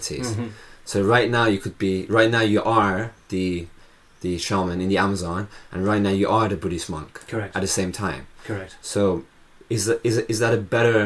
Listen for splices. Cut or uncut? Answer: uncut